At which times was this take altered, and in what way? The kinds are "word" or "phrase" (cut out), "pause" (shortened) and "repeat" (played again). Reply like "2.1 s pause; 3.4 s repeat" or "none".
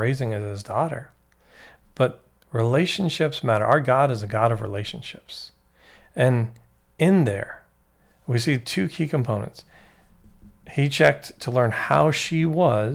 none

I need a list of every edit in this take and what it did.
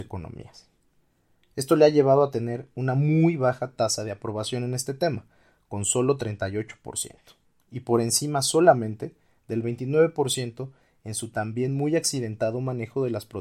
none

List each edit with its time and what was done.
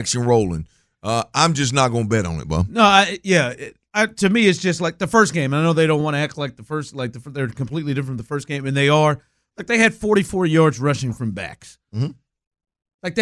none

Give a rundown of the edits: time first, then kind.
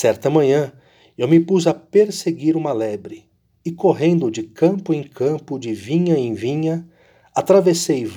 none

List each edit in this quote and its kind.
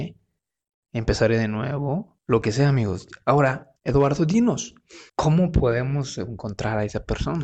2.2 s pause; 3.8 s pause; 5.1 s pause

